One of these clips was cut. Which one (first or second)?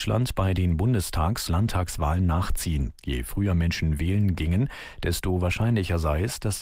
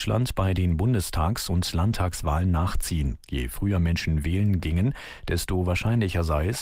first